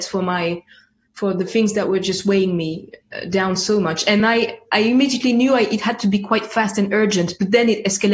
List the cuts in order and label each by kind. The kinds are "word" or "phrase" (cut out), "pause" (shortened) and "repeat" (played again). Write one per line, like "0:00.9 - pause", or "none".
none